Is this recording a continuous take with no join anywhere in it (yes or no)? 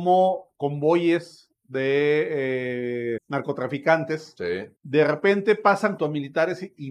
no